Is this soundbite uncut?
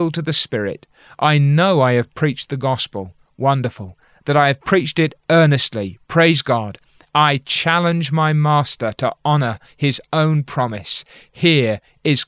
yes; 0 cuts

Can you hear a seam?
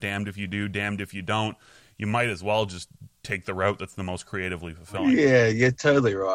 no; 0 cuts

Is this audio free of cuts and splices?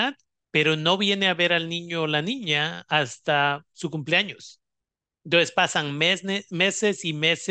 yes; 0 cuts

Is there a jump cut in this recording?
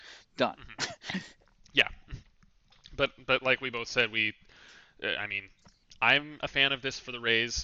no; 0 cuts

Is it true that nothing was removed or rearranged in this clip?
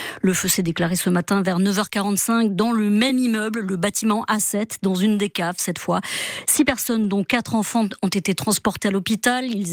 yes; 0 cuts

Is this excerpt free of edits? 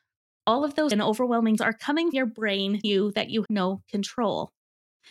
no; 5 cuts; at 0.9 s, 1.6 s, 2.1 s, 2.8 s, 3.5 s

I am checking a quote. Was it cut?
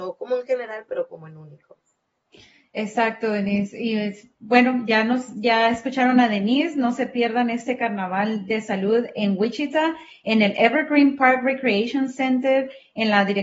no; 0 cuts

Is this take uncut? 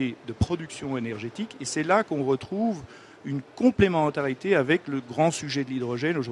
yes; 0 cuts

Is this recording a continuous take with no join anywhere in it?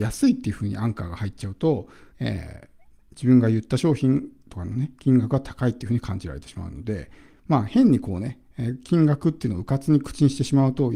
no; 1 cut; at 2.1 s

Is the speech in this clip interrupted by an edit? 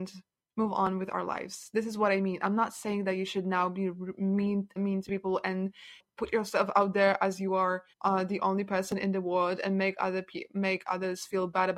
yes; 2 cuts; at 4.8 s, 7.9 s

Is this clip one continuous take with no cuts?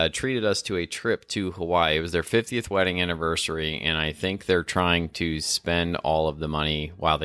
yes; 0 cuts

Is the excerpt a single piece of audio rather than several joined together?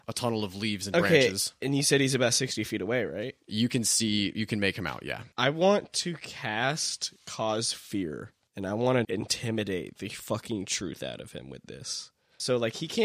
no; 2 cuts; at 5.3 s, 9.0 s

